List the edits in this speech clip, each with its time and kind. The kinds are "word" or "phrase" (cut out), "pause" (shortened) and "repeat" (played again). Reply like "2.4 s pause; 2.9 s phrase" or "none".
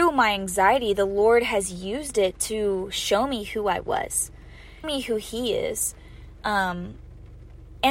4.8 s word